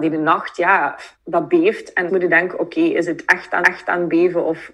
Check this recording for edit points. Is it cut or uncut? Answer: cut